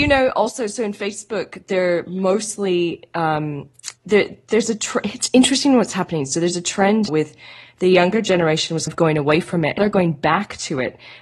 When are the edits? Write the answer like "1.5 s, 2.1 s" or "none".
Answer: 4.0 s, 7.1 s, 8.9 s, 9.8 s